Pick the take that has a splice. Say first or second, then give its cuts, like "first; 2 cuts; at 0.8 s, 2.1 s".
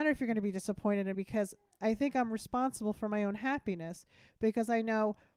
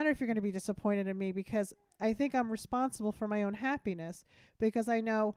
first; 1 cut; at 1.1 s